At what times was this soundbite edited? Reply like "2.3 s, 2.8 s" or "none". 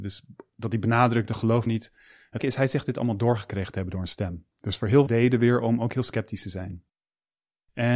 1.7 s, 2.4 s, 4.5 s, 5.1 s